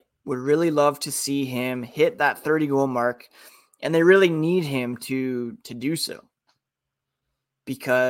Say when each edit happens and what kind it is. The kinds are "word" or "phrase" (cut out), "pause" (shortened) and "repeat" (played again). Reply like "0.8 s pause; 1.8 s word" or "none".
none